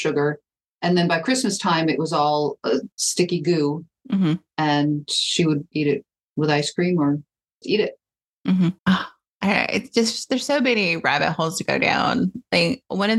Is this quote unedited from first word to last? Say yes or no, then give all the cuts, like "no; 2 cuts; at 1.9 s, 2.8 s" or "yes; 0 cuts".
no; 4 cuts; at 2.9 s, 5.7 s, 7.6 s, 8.8 s